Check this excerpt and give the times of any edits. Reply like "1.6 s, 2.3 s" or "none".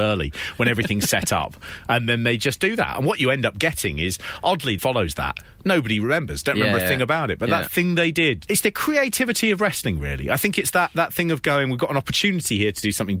4.8 s, 8.5 s

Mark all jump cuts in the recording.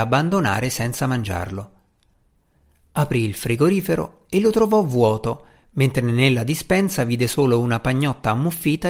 none

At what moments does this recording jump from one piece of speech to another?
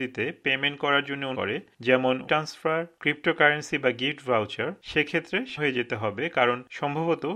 1.3 s, 2.3 s, 5.6 s

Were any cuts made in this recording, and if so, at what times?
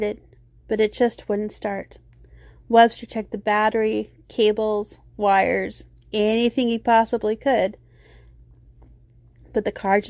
none

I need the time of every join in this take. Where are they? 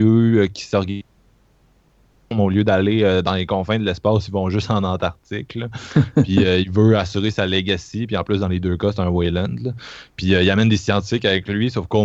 none

